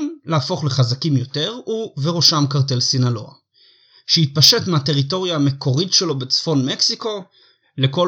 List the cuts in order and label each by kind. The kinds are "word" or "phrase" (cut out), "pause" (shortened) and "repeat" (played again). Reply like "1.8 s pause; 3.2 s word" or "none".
none